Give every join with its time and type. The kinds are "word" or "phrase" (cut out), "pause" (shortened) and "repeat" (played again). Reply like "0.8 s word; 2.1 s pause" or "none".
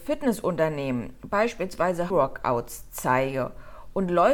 2.1 s word